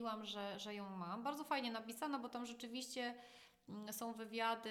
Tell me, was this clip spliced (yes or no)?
no